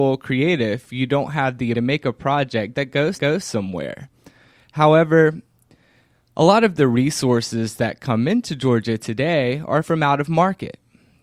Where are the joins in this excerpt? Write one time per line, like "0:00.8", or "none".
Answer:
0:01.7
0:03.1